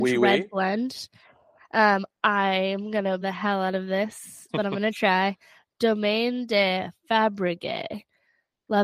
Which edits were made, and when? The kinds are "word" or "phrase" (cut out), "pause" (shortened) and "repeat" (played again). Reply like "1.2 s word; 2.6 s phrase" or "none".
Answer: 3.2 s word; 4.5 s word